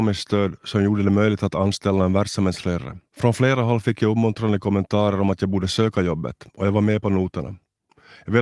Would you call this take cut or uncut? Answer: cut